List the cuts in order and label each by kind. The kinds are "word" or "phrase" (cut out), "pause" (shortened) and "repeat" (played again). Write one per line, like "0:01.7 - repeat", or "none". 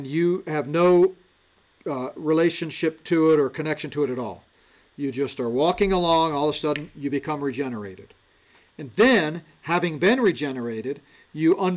none